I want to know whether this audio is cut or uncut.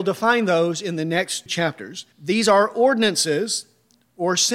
cut